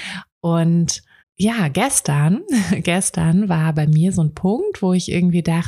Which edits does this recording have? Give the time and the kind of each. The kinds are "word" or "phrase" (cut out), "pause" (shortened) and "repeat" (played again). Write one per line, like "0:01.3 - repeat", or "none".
0:01.2 - pause